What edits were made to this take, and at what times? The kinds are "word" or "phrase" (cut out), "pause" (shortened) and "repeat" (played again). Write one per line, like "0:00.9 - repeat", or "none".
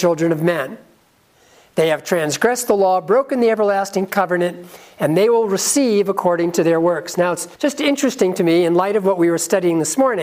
0:07.5 - pause